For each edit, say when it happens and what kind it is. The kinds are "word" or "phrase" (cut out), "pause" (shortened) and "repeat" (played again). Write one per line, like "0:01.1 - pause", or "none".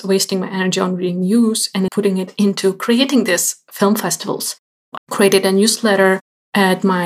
0:01.9 - word
0:05.0 - word